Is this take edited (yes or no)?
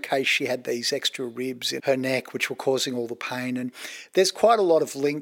yes